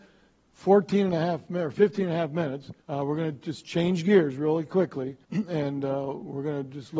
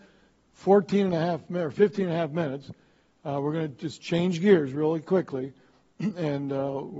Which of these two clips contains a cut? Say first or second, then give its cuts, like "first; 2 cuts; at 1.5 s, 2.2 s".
first; 2 cuts; at 2.8 s, 5.2 s